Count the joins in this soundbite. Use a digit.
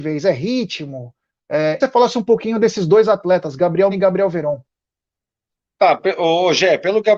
2